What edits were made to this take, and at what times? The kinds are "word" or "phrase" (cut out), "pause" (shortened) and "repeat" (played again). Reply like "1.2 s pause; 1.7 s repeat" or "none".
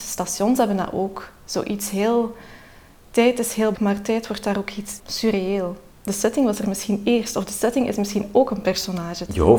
3.7 s word; 5.0 s word